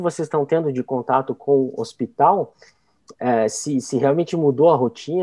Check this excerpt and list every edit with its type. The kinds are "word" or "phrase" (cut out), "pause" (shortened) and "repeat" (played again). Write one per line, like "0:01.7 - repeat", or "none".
none